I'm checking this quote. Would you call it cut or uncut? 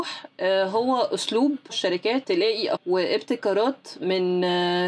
cut